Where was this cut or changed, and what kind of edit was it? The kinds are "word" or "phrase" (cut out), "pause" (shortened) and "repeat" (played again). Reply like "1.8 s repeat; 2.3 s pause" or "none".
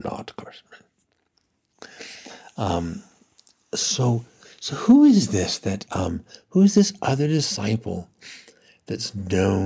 none